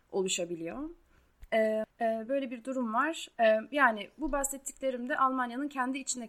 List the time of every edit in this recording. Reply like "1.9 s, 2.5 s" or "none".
1.9 s